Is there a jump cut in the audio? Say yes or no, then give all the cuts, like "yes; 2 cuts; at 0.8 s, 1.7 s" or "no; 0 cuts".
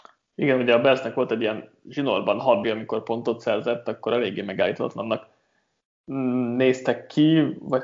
yes; 1 cut; at 2.6 s